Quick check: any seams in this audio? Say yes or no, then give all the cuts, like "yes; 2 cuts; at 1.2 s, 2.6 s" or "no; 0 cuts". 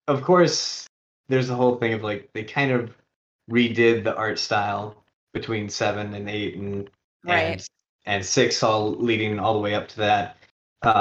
no; 0 cuts